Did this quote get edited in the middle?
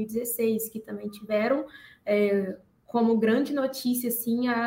no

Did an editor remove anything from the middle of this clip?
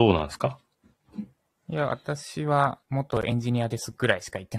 yes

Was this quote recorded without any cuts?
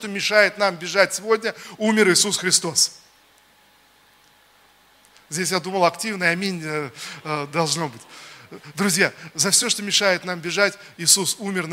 yes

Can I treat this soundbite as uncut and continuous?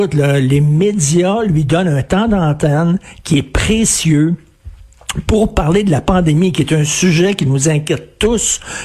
yes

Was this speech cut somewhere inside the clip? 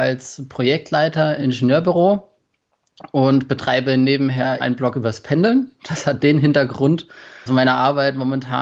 yes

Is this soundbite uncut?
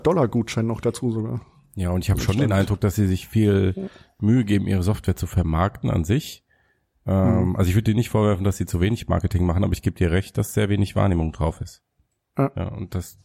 yes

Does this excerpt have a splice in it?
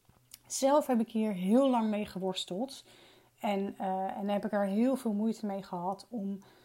no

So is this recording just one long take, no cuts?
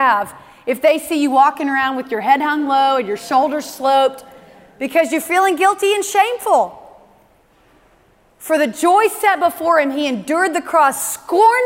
yes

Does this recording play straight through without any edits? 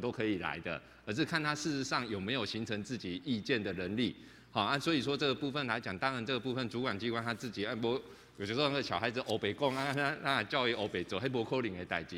yes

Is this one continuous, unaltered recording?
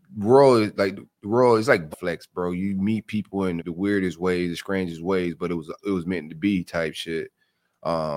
no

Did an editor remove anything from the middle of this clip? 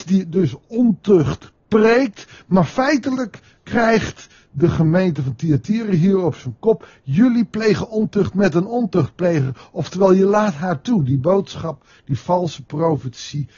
no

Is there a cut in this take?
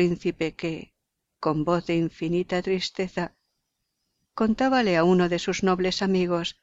no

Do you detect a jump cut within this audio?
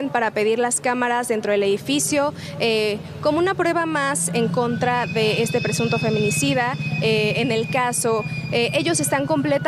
no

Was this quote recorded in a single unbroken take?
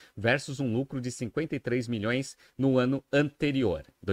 yes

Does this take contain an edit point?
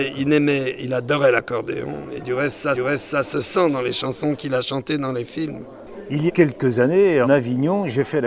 yes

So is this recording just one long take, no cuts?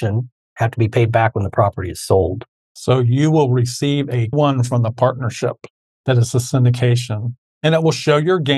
no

